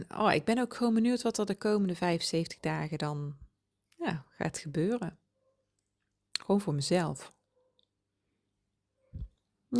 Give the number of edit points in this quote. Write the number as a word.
zero